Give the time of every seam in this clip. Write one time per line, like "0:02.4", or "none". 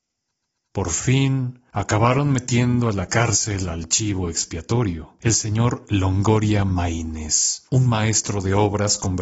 none